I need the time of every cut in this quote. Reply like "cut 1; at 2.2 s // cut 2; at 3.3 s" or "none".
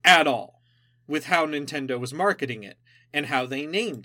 none